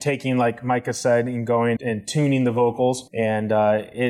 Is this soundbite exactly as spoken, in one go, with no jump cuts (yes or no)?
no